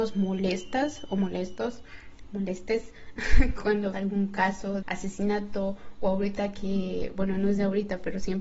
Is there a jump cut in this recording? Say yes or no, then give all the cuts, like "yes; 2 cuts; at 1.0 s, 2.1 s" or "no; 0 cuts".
yes; 2 cuts; at 3.9 s, 4.8 s